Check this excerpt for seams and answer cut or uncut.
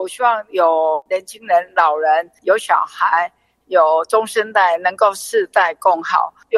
uncut